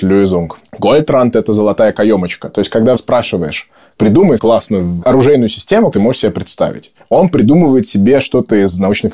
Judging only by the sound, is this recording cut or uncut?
cut